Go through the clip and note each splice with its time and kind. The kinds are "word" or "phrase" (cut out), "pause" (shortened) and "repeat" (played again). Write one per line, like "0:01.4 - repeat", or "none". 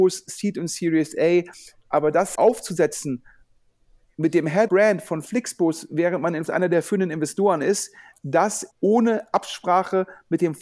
0:02.3 - word
0:04.7 - word
0:06.5 - word
0:08.7 - word